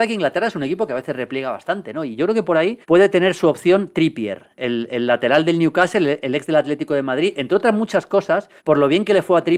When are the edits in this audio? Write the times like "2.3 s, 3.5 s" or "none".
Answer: 2.8 s, 8.6 s